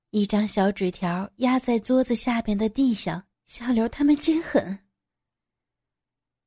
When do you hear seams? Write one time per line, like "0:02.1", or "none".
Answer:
0:03.3